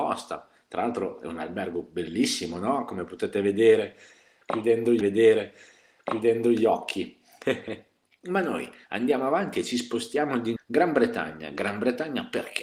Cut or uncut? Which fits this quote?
cut